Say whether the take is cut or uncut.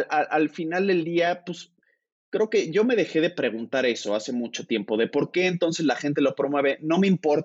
uncut